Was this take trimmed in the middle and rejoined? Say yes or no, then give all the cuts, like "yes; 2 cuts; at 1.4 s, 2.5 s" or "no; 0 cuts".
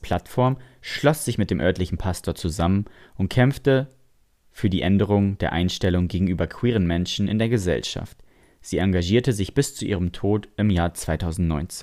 no; 0 cuts